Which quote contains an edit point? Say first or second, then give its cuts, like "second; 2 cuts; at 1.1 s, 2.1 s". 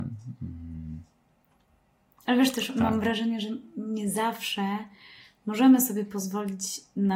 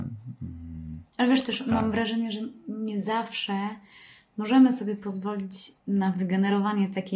second; 1 cut; at 1.1 s